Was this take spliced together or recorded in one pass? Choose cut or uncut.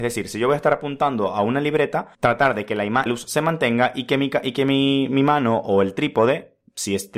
cut